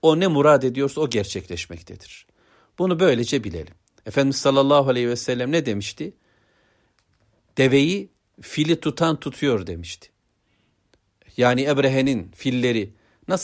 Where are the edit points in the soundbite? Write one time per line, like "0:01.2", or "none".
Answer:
none